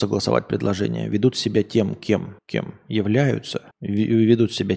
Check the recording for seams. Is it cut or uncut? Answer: cut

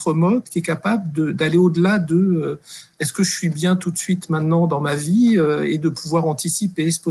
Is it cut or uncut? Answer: uncut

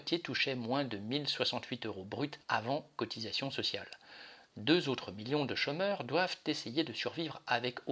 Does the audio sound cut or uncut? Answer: cut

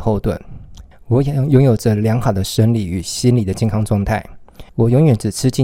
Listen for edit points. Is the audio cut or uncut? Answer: cut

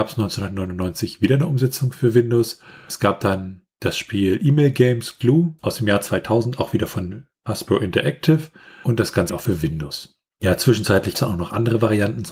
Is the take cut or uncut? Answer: cut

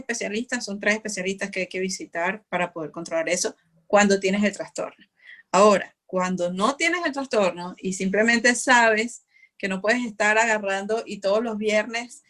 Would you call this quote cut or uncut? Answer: uncut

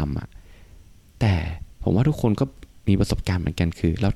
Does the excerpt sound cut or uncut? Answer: cut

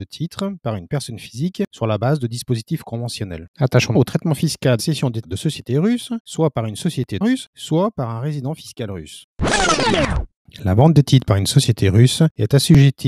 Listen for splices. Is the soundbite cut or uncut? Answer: cut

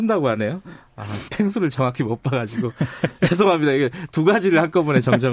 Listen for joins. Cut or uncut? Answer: cut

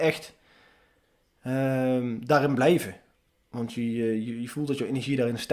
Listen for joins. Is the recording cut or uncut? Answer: uncut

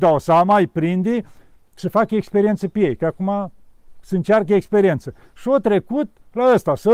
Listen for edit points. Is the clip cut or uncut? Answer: uncut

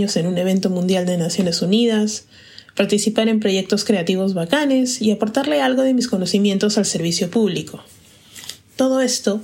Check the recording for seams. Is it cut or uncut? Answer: uncut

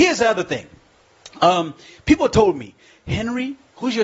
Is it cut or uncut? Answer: uncut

